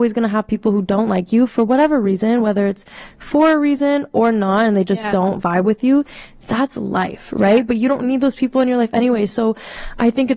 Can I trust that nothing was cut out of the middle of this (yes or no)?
yes